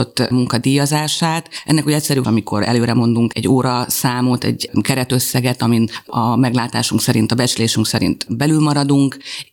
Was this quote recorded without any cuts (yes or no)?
no